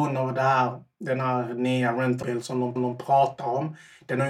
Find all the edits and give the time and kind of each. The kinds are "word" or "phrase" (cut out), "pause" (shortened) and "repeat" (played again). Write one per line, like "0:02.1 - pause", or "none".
0:02.2 - word
0:02.8 - repeat